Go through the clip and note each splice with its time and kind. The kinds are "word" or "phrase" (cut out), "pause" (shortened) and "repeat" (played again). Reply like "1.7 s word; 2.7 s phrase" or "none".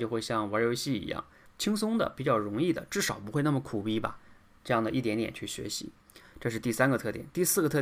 1.5 s word